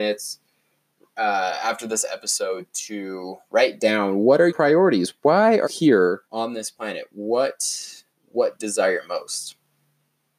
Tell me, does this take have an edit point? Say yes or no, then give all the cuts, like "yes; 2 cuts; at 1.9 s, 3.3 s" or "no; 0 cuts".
yes; 6 cuts; at 3.4 s, 4.5 s, 5.6 s, 6.2 s, 8.1 s, 8.6 s